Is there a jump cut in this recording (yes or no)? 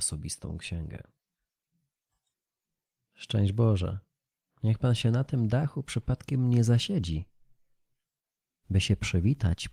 no